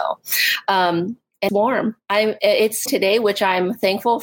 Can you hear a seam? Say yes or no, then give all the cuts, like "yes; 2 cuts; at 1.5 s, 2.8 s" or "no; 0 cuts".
yes; 2 cuts; at 1.5 s, 2.9 s